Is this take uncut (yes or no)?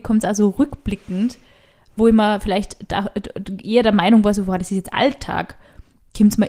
yes